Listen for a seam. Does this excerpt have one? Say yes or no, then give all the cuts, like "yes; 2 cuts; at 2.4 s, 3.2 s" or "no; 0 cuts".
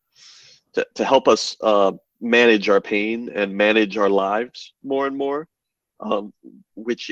no; 0 cuts